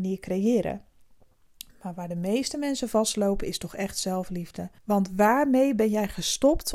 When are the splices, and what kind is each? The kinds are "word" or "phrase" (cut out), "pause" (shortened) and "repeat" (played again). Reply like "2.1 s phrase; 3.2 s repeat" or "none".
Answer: 4.8 s pause